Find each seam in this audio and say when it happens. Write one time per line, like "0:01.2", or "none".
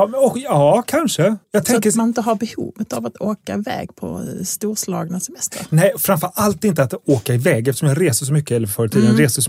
0:01.4